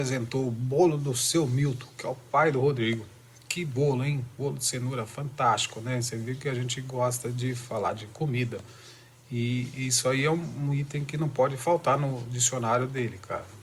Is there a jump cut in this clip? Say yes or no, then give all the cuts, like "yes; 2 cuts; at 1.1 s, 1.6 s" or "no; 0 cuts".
no; 0 cuts